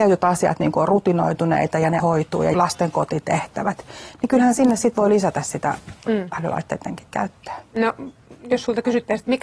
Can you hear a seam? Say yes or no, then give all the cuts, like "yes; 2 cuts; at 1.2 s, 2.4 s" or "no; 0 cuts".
yes; 2 cuts; at 2.0 s, 2.5 s